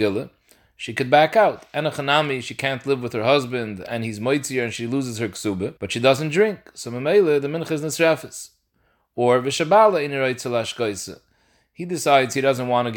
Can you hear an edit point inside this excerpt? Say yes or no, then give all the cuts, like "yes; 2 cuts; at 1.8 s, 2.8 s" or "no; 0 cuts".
yes; 1 cut; at 5.8 s